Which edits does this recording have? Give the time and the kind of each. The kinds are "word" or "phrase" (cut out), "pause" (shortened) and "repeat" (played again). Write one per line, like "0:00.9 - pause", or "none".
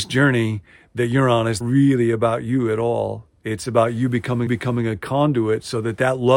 0:01.6 - word
0:04.5 - repeat